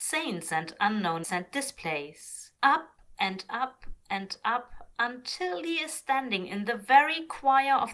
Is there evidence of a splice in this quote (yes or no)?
yes